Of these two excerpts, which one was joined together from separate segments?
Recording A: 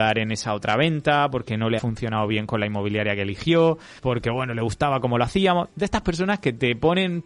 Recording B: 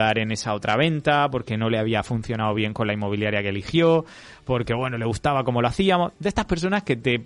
A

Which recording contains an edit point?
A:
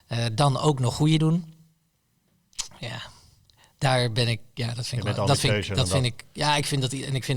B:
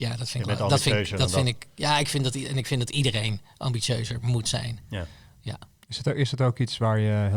A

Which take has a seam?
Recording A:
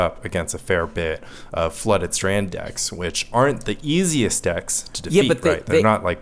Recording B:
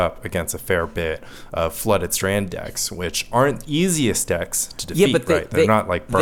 B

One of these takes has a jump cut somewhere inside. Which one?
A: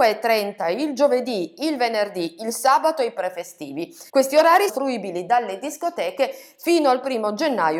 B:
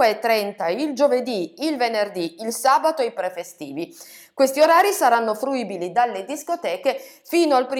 A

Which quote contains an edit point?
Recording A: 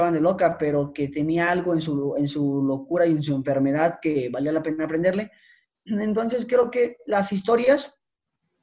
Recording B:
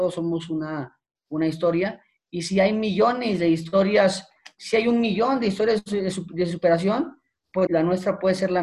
B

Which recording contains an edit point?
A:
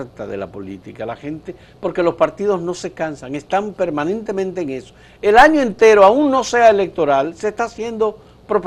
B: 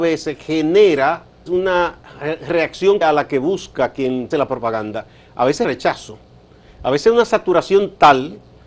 B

